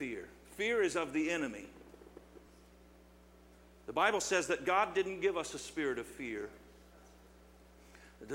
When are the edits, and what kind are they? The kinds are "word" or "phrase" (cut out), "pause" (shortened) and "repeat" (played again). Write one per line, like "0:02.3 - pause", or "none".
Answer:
none